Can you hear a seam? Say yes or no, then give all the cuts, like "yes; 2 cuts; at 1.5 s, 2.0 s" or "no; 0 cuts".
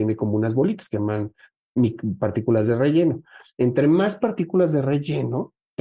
no; 0 cuts